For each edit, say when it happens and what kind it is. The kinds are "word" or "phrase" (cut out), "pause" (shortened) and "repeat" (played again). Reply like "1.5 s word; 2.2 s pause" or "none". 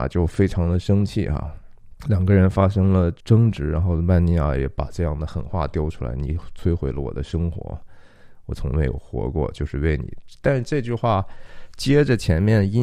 2.0 s pause; 3.2 s pause